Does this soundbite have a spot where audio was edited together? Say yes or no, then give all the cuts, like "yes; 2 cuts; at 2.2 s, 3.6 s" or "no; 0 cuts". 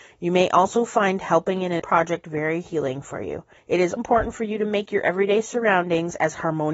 yes; 3 cuts; at 1.8 s, 3.6 s, 4.0 s